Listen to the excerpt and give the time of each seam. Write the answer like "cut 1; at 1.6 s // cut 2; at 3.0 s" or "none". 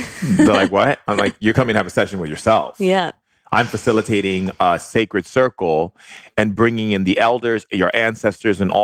none